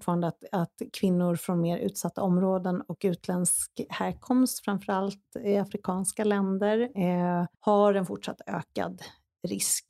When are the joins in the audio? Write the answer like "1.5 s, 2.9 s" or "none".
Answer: 7.5 s